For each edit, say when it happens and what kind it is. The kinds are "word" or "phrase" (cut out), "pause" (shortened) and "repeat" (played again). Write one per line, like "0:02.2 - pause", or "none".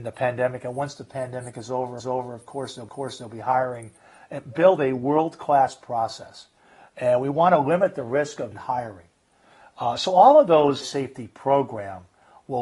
0:02.0 - repeat
0:02.9 - repeat
0:08.5 - word
0:10.8 - phrase